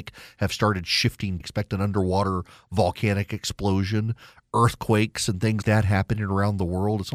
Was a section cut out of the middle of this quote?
yes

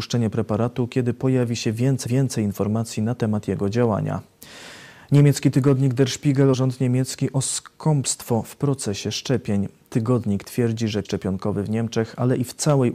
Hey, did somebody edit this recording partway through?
yes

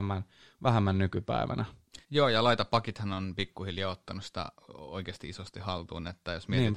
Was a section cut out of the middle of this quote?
yes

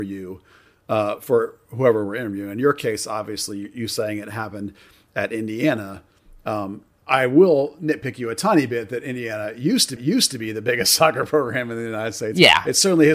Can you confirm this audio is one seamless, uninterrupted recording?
no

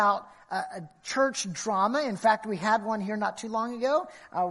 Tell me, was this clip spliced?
no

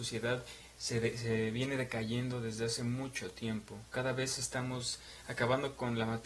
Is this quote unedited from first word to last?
yes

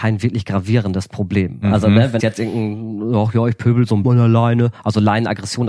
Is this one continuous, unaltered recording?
no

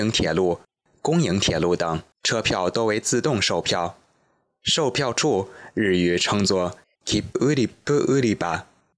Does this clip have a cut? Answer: yes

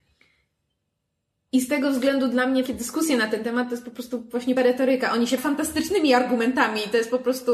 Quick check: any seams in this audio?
yes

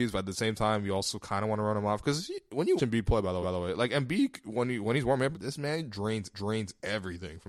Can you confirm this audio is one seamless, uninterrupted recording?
no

